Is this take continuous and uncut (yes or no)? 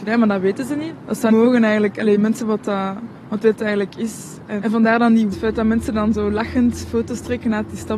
no